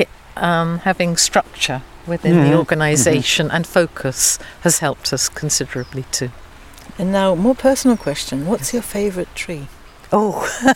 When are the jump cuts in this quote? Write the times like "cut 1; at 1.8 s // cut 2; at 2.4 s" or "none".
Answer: none

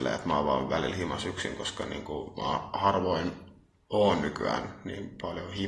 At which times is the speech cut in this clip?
none

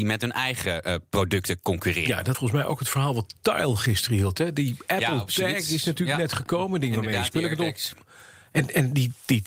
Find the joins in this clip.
cut 1; at 2.3 s

